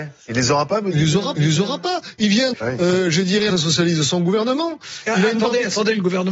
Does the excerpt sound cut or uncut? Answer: cut